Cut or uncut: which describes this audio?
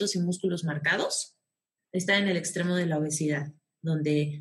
cut